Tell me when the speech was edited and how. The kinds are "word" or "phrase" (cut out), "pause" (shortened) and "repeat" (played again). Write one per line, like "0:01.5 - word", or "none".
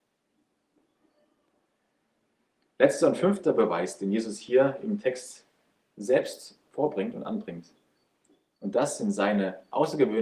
none

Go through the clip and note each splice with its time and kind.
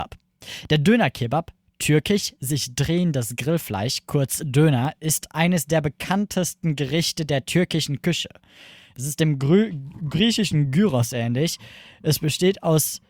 none

